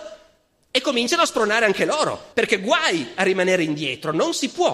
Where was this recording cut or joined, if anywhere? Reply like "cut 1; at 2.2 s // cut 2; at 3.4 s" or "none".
cut 1; at 2.3 s